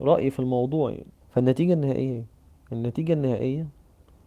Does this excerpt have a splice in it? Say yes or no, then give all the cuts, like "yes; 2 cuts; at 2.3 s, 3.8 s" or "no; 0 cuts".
yes; 1 cut; at 1.2 s